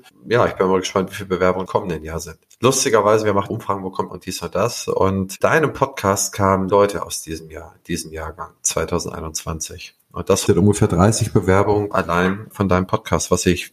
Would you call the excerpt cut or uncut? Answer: cut